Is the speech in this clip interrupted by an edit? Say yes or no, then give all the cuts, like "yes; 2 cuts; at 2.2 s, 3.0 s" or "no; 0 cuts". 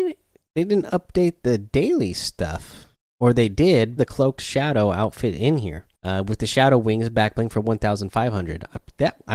yes; 3 cuts; at 2.9 s, 4.0 s, 5.9 s